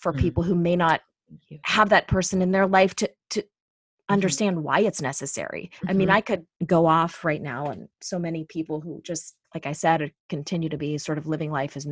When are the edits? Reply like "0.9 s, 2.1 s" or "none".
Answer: 5.8 s, 6.5 s, 9.4 s